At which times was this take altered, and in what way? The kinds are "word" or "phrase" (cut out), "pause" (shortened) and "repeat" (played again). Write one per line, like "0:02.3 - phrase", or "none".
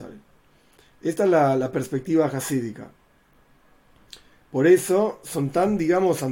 none